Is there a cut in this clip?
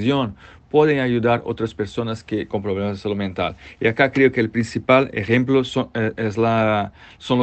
yes; 1 cut; at 2.5 s

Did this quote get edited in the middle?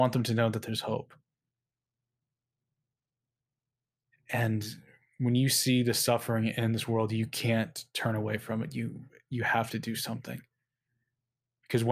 no; 0 cuts

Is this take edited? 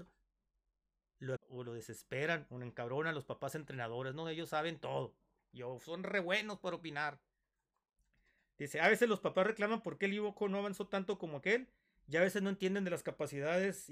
yes; 1 cut; at 1.4 s

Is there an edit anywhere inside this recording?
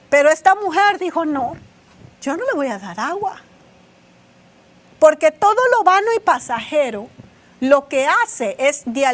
no; 0 cuts

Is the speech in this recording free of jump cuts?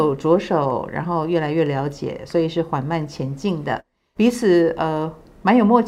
yes; 0 cuts

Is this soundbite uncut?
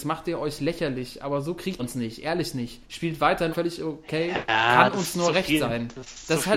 no; 3 cuts; at 1.8 s, 2.8 s, 3.5 s

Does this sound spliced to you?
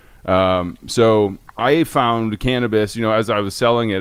yes; 1 cut; at 1.5 s

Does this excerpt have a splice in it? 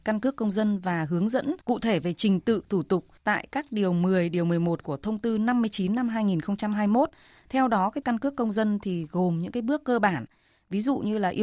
yes; 3 cuts; at 1.6 s, 3.2 s, 8.0 s

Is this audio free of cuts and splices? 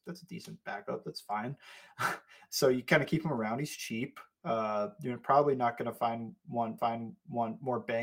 no; 1 cut; at 6.8 s

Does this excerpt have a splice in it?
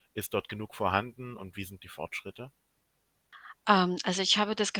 no; 0 cuts

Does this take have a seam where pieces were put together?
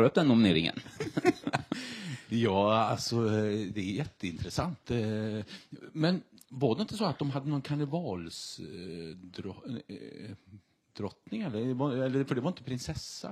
no; 0 cuts

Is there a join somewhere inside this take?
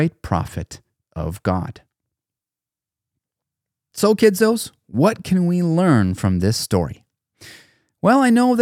no; 0 cuts

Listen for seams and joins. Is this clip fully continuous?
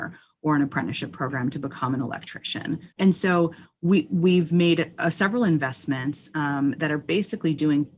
no; 1 cut; at 2.9 s

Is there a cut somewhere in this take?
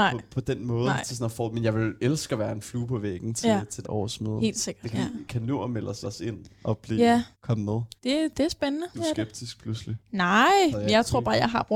yes; 6 cuts; at 3.8 s, 4.9 s, 6.0 s, 7.3 s, 8.0 s, 8.9 s

